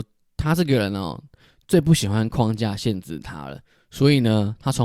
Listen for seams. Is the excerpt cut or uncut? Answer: uncut